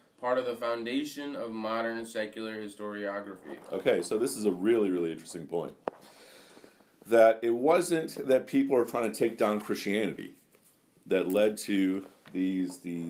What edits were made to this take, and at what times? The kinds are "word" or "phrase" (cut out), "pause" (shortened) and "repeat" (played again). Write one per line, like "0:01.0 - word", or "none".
none